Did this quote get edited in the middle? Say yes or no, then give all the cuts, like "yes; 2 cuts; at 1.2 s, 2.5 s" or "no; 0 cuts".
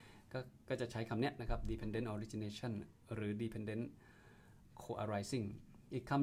no; 0 cuts